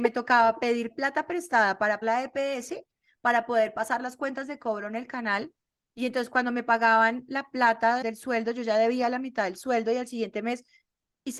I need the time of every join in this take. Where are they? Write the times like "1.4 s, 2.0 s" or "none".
2.0 s, 8.0 s